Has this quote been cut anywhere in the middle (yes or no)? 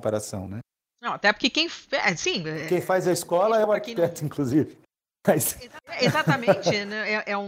no